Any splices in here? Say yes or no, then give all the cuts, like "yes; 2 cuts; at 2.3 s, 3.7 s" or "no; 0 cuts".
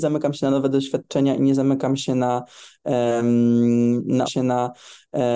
yes; 1 cut; at 4.2 s